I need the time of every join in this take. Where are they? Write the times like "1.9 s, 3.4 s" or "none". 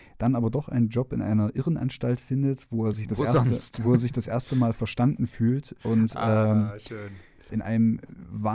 none